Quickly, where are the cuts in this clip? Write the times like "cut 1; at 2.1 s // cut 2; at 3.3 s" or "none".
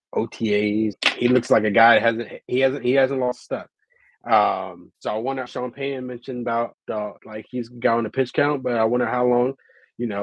cut 1; at 0.9 s // cut 2; at 4.9 s // cut 3; at 5.4 s // cut 4; at 6.7 s // cut 5; at 7.2 s